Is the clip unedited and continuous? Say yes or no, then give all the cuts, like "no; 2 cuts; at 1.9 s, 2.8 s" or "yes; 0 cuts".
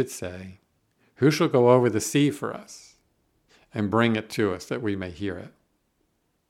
yes; 0 cuts